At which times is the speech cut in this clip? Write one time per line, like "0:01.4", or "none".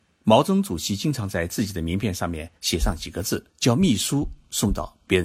0:02.6
0:03.5